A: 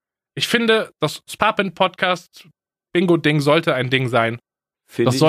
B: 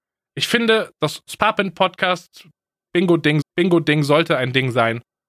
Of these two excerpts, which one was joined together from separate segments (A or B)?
B